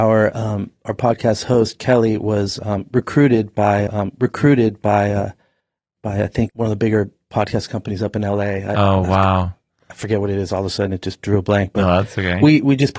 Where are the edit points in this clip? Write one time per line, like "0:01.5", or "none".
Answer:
0:03.9
0:06.5